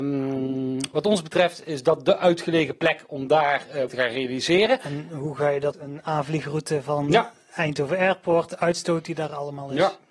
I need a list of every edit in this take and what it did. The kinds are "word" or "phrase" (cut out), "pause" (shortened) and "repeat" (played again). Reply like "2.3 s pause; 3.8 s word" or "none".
3.9 s word; 5.7 s phrase